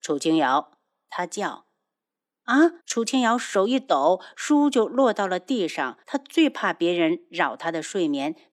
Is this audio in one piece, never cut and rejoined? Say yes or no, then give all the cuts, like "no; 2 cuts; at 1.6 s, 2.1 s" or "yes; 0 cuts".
no; 2 cuts; at 2.8 s, 6.0 s